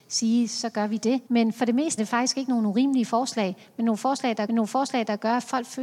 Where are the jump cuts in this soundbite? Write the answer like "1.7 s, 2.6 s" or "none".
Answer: 1.3 s, 2.0 s, 4.5 s